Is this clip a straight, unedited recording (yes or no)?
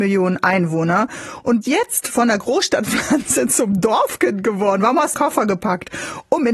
no